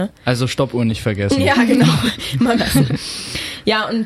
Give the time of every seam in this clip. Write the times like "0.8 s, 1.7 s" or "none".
2.6 s